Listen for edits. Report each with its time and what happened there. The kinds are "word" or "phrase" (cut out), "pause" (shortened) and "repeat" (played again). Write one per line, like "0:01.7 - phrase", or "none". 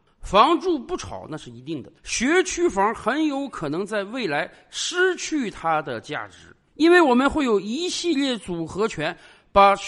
0:02.0 - pause